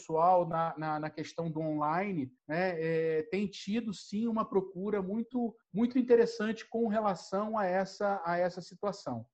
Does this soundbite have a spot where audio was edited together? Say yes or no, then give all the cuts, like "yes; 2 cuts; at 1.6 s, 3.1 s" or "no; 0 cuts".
yes; 2 cuts; at 2.4 s, 5.6 s